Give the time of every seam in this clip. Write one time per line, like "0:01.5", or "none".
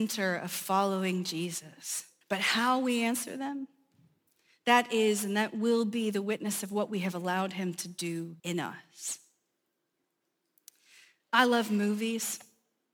0:02.2
0:08.4